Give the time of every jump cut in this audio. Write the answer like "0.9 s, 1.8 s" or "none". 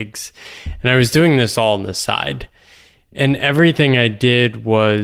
none